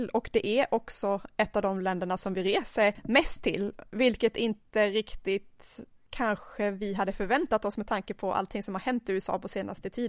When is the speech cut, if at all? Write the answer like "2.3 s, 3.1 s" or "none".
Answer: none